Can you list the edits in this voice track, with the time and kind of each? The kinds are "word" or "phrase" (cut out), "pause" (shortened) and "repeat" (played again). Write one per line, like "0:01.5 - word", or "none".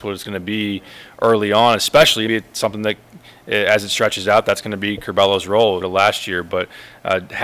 0:02.3 - word
0:05.8 - word

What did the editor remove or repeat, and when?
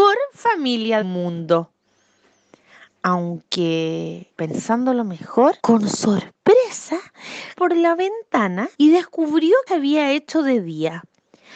0:01.0 - word
0:04.3 - pause
0:05.6 - pause
0:07.6 - phrase
0:08.7 - pause
0:09.7 - phrase

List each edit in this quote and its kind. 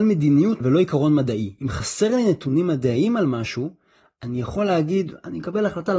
none

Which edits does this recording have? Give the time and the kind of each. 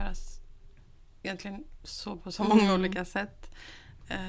0:02.2 - word

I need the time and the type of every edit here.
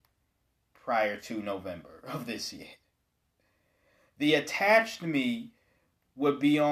none

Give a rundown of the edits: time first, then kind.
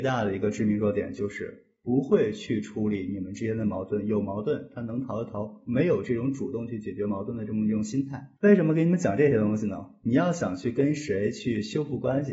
0:08.4 - pause

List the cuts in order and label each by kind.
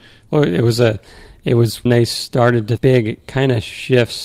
0:01.9 - word
0:02.8 - word

